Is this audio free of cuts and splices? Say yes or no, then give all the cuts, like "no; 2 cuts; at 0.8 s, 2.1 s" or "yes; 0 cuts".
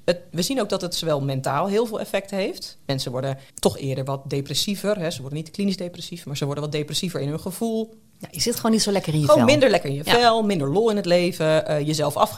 no; 1 cut; at 3.5 s